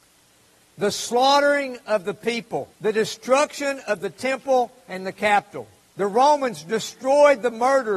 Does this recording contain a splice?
yes; 2 cuts; at 2.7 s, 5.8 s

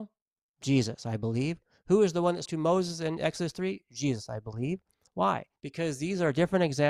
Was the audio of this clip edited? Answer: yes; 2 cuts; at 2.5 s, 5.6 s

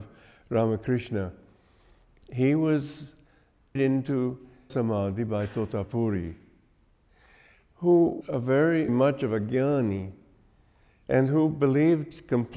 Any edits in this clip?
yes; 4 cuts; at 3.8 s, 4.7 s, 8.2 s, 8.9 s

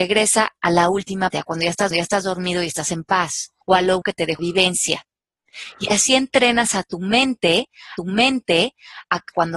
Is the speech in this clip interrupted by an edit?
yes; 6 cuts; at 1.3 s, 1.9 s, 3.6 s, 4.0 s, 4.4 s, 8.0 s

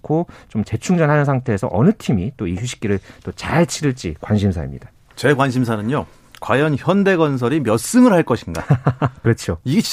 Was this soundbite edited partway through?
no; 0 cuts

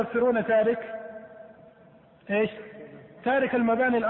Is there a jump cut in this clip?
no; 0 cuts

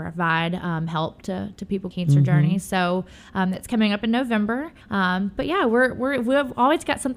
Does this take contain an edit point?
yes; 2 cuts; at 1.9 s, 4.8 s

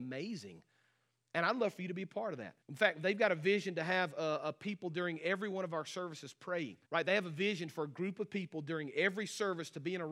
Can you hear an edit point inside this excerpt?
yes; 2 cuts; at 2.6 s, 6.8 s

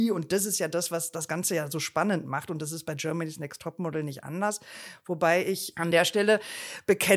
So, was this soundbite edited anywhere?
no; 0 cuts

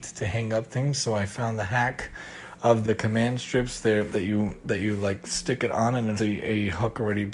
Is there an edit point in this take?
yes; 2 cuts; at 2.8 s, 6.2 s

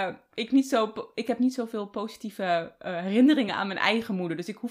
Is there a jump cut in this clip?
no; 0 cuts

